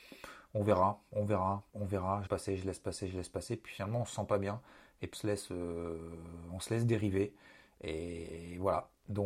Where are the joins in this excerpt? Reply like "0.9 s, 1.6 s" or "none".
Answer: 2.3 s, 5.1 s